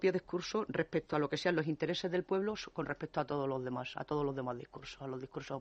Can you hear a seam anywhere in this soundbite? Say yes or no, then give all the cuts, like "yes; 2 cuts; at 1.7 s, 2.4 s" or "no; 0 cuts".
no; 0 cuts